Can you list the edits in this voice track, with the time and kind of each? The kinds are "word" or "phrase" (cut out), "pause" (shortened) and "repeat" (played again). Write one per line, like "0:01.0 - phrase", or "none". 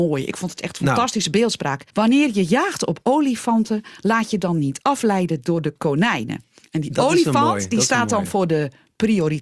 0:01.9 - pause